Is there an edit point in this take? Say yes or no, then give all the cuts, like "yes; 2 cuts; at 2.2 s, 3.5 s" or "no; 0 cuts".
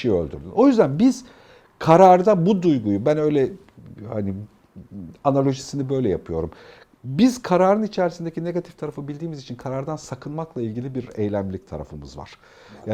no; 0 cuts